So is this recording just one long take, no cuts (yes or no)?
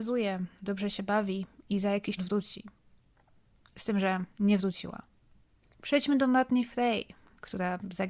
no